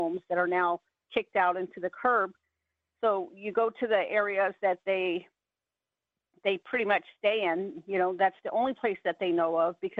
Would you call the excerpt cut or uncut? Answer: uncut